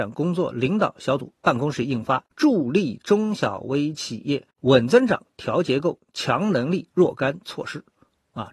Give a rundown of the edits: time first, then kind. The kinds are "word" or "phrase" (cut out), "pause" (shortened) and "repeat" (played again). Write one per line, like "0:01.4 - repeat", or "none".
0:02.3 - pause
0:04.5 - pause